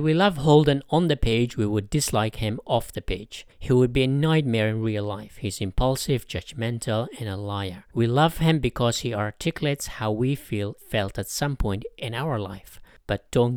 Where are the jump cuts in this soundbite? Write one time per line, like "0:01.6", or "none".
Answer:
0:03.5
0:07.9
0:10.8